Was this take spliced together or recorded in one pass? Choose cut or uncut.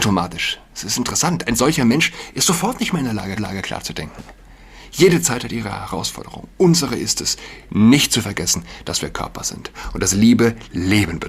cut